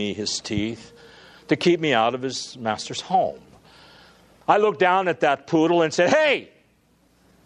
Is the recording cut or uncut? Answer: uncut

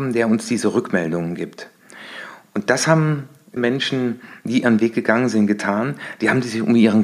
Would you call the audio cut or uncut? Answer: cut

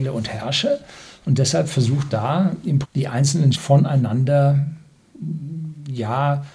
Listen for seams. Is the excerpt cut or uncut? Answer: cut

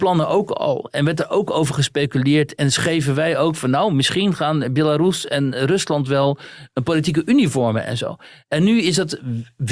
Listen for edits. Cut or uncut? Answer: uncut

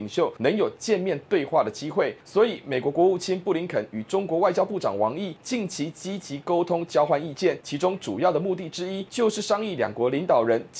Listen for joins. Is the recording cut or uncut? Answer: uncut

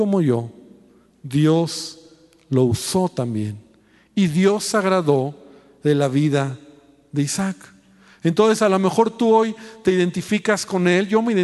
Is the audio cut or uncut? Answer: uncut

